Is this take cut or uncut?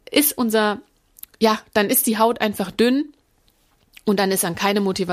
uncut